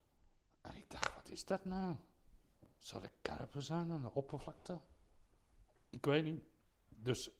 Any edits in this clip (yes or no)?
no